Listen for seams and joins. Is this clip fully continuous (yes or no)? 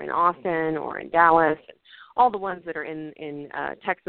yes